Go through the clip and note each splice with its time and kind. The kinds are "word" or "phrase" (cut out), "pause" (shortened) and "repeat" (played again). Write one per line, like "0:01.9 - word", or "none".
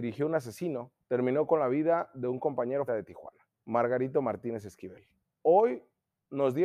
0:01.0 - pause
0:02.9 - word
0:03.6 - pause
0:05.2 - pause